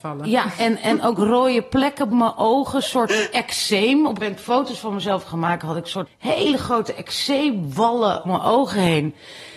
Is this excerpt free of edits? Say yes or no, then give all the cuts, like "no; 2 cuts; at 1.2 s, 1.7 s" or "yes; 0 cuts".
no; 4 cuts; at 2.1 s, 4.2 s, 6.1 s, 8.2 s